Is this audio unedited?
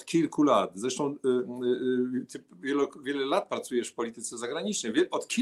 yes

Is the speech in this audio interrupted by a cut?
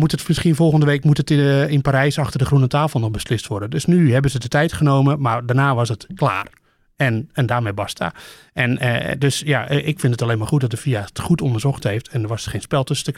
no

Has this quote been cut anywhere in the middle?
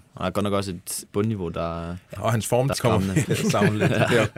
yes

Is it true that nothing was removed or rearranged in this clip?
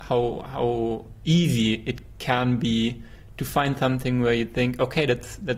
yes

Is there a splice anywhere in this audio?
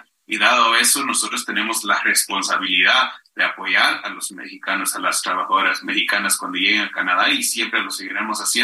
yes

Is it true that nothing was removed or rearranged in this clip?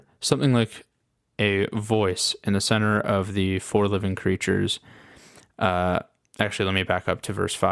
yes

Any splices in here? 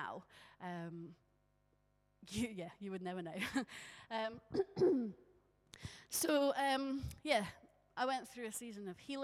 no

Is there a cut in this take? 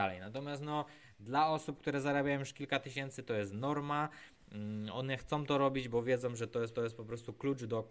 yes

